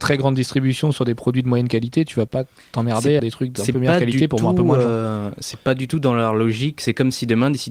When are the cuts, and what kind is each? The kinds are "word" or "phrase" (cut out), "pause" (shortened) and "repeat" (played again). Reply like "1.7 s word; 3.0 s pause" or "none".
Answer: 3.2 s phrase